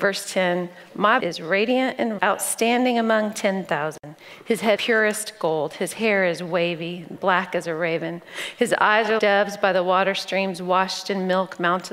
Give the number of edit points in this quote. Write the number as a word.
four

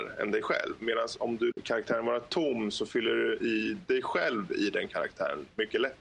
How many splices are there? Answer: one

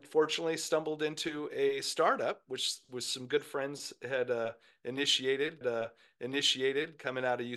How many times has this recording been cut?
one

